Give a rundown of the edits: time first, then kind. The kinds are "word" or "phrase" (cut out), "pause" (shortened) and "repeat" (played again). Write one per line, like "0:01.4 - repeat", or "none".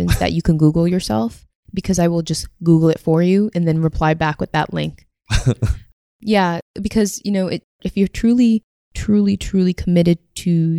none